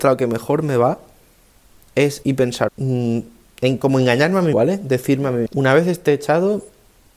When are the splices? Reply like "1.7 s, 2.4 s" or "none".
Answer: 2.2 s, 2.7 s, 4.5 s, 5.5 s